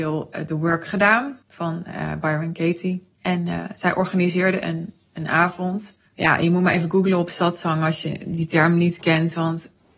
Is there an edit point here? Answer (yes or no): yes